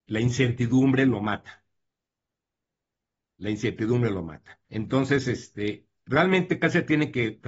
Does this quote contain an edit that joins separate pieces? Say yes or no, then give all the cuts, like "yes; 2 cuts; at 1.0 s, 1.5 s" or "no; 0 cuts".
yes; 1 cut; at 4.6 s